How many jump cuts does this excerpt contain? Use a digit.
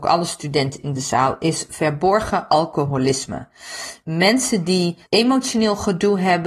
1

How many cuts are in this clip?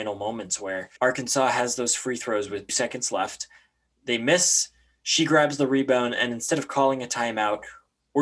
2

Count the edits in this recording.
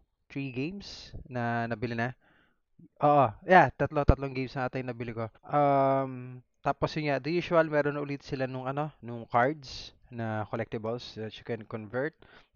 1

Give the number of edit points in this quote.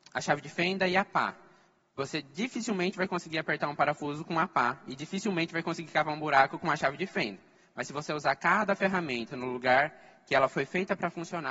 0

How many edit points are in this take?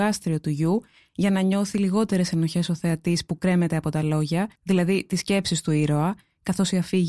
1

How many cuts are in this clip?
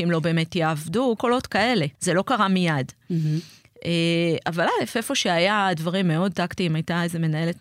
2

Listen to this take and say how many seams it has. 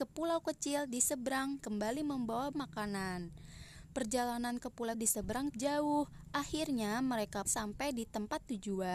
5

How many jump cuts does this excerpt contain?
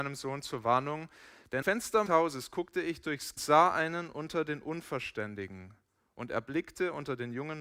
3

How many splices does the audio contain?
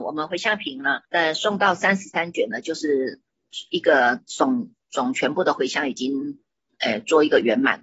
1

